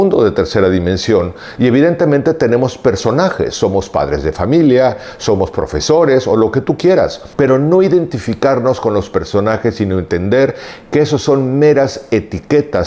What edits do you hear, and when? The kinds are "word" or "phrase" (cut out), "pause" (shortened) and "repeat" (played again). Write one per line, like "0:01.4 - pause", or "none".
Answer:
0:07.3 - pause